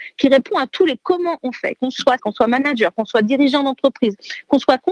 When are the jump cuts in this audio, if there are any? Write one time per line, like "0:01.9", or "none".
0:02.2